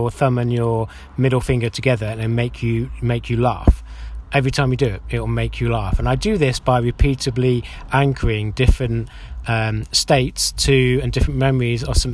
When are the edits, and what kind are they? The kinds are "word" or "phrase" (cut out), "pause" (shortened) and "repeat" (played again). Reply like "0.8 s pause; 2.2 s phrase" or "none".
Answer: none